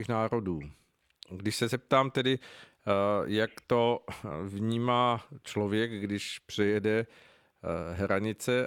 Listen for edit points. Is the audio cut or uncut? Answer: uncut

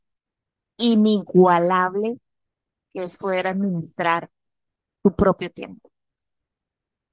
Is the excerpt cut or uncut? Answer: uncut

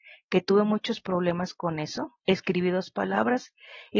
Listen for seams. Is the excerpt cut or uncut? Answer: cut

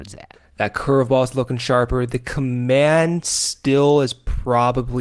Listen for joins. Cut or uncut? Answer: uncut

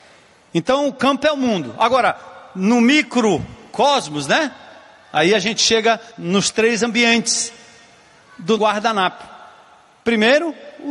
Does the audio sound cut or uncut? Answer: cut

